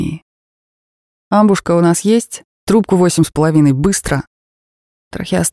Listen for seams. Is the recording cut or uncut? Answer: cut